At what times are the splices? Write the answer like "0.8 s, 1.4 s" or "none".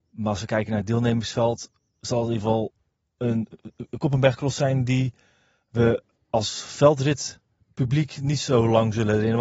6.2 s